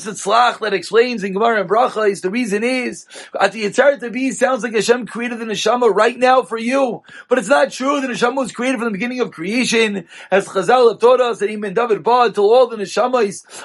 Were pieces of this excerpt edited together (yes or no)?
no